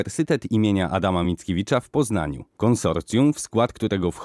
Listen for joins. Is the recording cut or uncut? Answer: uncut